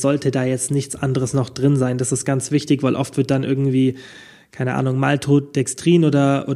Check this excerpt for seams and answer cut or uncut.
uncut